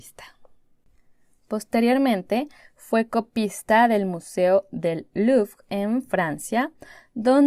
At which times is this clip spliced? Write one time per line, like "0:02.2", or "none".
none